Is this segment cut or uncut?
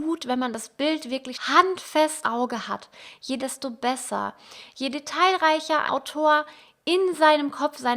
cut